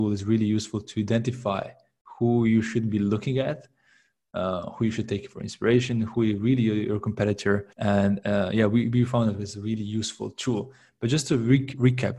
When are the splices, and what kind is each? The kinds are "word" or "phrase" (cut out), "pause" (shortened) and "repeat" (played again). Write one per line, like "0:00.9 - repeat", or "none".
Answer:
0:07.7 - pause